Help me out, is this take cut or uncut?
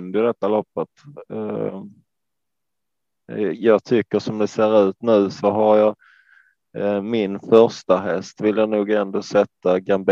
uncut